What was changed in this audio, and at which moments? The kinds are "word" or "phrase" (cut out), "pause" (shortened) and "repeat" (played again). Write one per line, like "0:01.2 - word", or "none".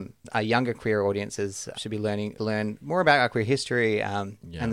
0:01.7 - word
0:02.4 - word